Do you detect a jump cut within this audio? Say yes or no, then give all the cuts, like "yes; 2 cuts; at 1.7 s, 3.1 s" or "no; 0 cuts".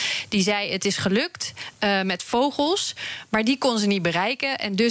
no; 0 cuts